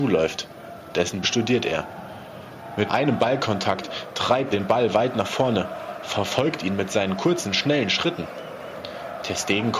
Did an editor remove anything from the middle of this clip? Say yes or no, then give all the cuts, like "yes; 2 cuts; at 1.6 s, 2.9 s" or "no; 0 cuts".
yes; 3 cuts; at 1.2 s, 2.9 s, 4.5 s